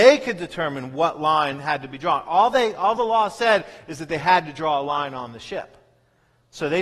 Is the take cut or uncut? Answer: uncut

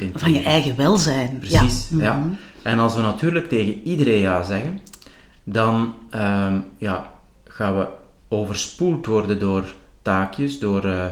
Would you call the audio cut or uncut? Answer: uncut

